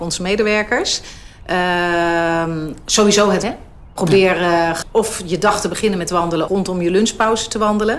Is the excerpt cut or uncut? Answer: cut